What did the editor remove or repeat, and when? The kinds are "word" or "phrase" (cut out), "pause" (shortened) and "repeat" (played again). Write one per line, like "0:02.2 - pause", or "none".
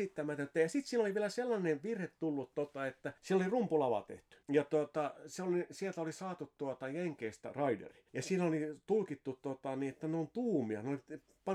0:03.2 - pause
0:04.4 - pause
0:08.1 - pause